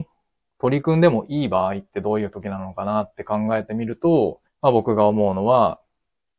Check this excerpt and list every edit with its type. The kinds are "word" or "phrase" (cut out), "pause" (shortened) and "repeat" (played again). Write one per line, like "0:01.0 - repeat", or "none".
0:04.5 - pause